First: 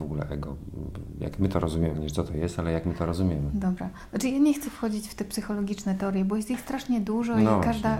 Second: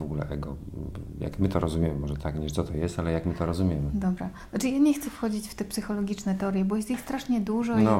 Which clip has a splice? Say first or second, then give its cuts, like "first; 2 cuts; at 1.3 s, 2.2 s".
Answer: first; 1 cut; at 1.9 s